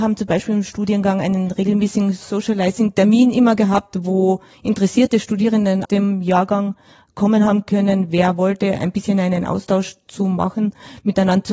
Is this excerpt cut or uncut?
cut